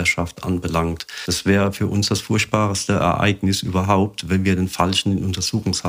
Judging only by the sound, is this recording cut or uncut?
uncut